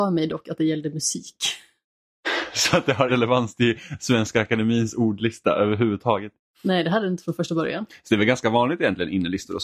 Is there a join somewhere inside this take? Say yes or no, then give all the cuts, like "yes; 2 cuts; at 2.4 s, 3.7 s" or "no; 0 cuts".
yes; 2 cuts; at 3.1 s, 6.4 s